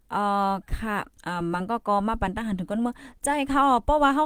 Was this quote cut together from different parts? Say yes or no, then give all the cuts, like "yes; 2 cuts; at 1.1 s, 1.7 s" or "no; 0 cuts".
yes; 1 cut; at 1.2 s